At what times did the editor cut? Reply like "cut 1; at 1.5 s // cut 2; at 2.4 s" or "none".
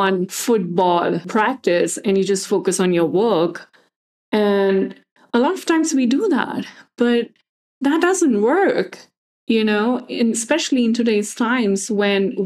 none